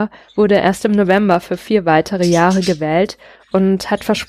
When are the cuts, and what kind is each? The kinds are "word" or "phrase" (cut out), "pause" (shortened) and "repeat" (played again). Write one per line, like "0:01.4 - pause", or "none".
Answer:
none